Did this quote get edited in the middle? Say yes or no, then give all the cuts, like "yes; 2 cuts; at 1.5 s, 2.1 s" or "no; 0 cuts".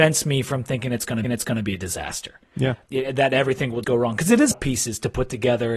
yes; 4 cuts; at 1.2 s, 2.9 s, 3.8 s, 4.5 s